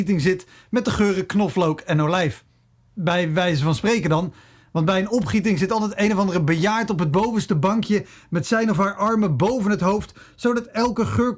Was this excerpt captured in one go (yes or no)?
yes